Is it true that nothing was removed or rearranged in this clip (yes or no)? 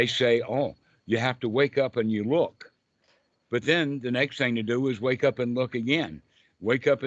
yes